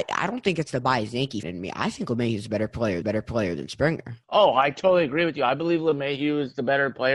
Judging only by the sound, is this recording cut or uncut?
cut